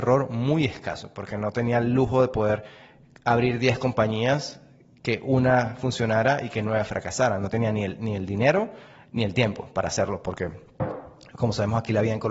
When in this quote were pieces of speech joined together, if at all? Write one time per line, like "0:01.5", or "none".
none